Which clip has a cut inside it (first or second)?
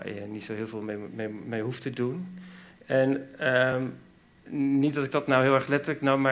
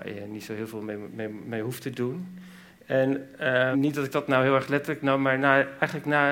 second